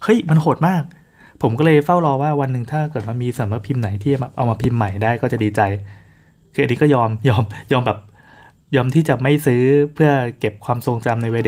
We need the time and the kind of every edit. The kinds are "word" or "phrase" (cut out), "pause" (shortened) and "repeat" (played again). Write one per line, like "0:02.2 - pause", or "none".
none